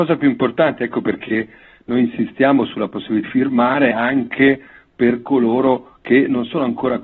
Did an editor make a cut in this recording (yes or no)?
yes